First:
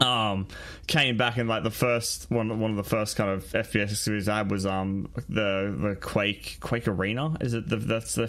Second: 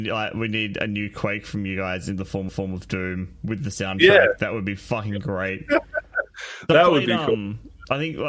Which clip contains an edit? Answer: second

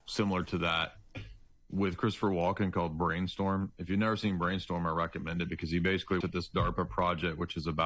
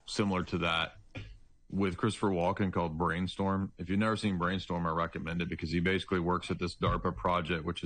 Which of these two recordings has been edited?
first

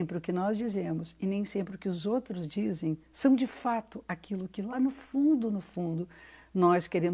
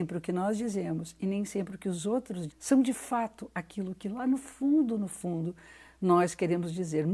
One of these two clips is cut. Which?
second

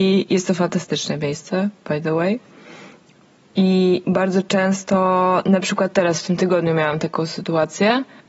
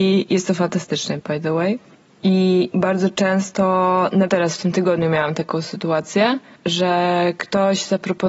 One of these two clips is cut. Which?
second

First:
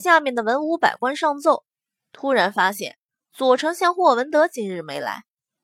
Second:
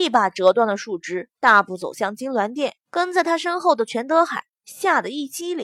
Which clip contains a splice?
second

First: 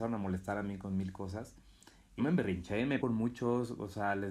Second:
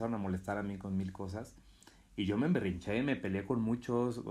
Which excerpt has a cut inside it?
first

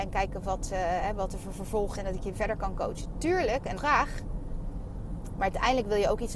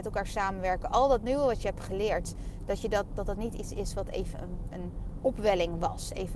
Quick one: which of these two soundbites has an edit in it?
first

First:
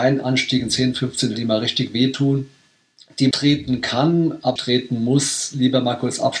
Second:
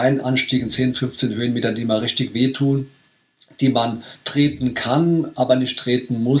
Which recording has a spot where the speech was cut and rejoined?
first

